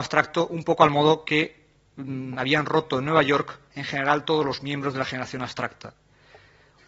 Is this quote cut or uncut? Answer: uncut